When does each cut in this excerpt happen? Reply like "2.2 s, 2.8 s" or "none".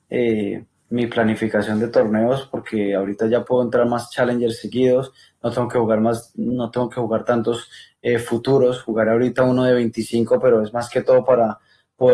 none